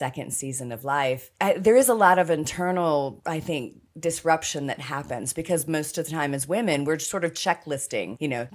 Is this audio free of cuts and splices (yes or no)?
yes